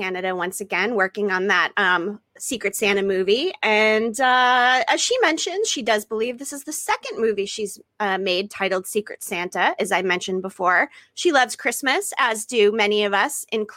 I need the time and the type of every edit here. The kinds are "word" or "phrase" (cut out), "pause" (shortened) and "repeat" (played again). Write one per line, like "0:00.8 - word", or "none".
none